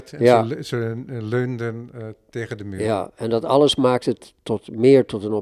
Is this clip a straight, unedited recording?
yes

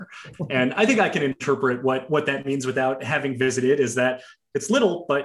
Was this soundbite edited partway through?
no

